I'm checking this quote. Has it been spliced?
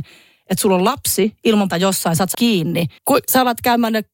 yes; 3 cuts; at 1.7 s, 2.3 s, 3.0 s

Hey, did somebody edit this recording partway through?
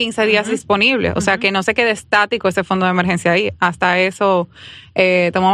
no; 0 cuts

